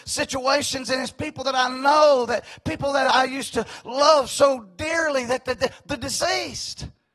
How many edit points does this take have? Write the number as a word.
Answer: zero